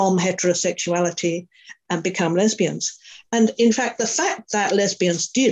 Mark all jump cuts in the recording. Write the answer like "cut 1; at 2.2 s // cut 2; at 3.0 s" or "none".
none